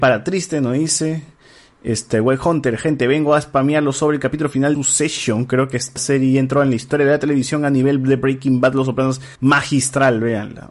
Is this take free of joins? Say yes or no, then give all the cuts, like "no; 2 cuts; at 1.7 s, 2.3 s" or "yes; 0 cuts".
no; 3 cuts; at 4.7 s, 6.0 s, 9.4 s